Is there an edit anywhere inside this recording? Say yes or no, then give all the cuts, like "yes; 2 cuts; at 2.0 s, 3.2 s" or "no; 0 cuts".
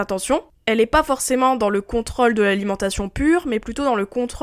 no; 0 cuts